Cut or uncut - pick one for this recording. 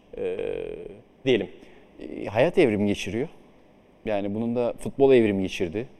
cut